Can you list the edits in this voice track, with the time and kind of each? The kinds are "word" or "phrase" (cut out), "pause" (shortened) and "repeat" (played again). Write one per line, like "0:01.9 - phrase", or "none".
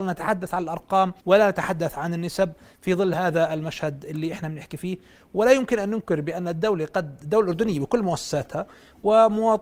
0:01.2 - pause